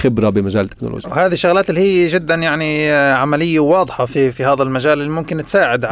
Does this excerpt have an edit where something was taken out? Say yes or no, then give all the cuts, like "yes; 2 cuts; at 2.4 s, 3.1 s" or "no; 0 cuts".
yes; 1 cut; at 4.3 s